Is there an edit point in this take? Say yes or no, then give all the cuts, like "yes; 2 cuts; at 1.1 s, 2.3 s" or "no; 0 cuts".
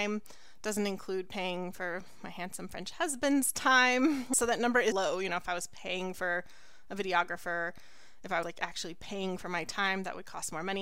yes; 2 cuts; at 4.9 s, 8.4 s